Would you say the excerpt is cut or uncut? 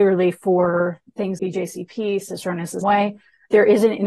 cut